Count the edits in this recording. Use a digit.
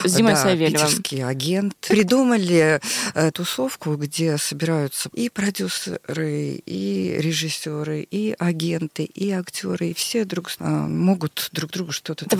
3